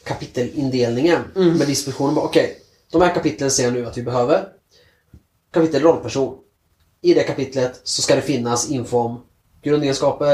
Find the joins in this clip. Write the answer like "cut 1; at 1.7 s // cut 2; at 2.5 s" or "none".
none